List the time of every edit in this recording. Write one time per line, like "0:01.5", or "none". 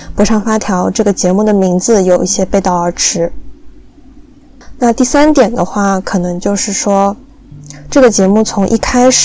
none